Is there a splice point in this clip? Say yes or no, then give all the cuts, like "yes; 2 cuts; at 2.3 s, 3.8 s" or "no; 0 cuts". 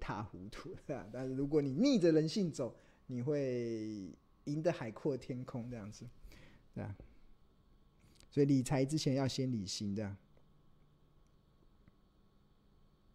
no; 0 cuts